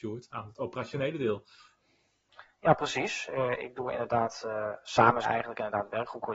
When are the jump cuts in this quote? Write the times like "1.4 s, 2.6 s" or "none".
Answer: 5.2 s